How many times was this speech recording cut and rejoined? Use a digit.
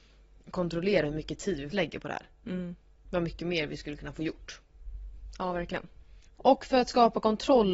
1